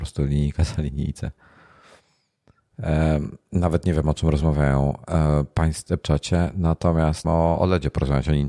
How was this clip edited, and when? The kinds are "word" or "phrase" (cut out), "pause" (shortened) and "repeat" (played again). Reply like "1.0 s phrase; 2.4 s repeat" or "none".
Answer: 6.0 s phrase; 7.2 s word